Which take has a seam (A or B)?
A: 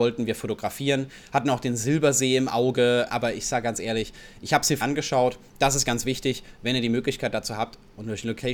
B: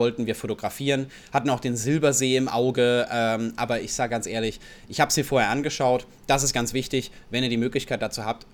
A